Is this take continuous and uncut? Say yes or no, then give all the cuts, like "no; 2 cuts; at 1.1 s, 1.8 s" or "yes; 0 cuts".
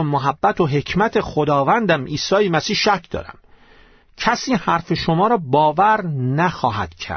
yes; 0 cuts